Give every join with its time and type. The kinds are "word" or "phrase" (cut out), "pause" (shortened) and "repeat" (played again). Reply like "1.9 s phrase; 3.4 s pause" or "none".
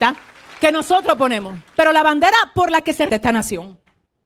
1.7 s pause; 3.1 s word